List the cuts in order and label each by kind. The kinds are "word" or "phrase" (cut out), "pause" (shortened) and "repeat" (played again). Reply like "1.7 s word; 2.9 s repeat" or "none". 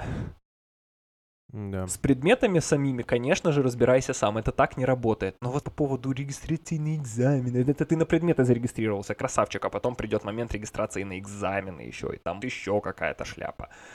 5.6 s phrase; 12.4 s word